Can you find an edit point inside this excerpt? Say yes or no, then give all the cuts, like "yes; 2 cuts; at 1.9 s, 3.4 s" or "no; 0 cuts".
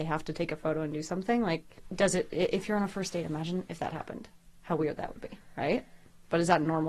no; 0 cuts